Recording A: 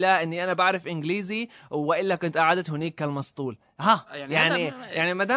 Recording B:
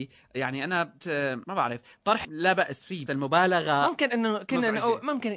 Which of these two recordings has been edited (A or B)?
B